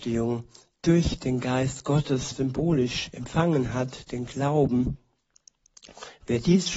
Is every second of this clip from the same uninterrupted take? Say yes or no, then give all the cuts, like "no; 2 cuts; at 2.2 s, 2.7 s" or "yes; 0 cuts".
no; 2 cuts; at 2.3 s, 4.1 s